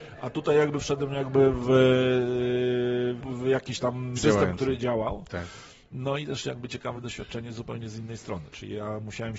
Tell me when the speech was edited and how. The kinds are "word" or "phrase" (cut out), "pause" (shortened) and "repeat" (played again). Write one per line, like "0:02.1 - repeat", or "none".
0:03.2 - word
0:04.2 - word
0:06.9 - word